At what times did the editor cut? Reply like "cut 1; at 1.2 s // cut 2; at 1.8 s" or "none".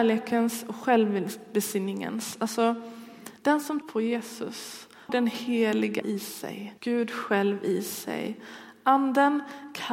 cut 1; at 3.4 s // cut 2; at 3.8 s // cut 3; at 5.1 s // cut 4; at 6.0 s // cut 5; at 6.8 s